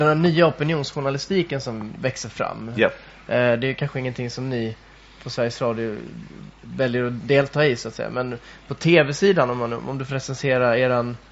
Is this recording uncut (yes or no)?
yes